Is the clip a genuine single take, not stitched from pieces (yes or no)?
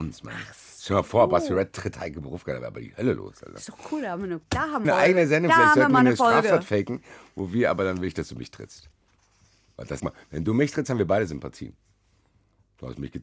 no